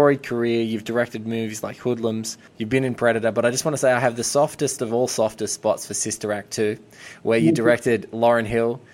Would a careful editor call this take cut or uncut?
cut